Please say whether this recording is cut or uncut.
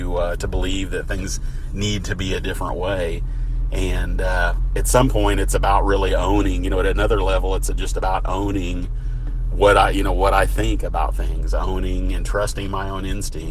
uncut